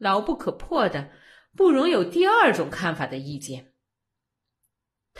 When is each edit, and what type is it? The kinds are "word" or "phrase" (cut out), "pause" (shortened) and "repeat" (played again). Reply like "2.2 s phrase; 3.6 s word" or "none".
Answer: none